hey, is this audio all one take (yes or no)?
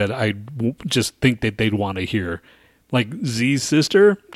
yes